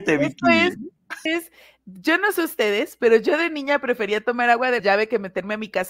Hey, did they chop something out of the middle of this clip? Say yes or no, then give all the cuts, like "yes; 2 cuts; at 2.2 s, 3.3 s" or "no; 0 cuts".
yes; 2 cuts; at 1.3 s, 4.8 s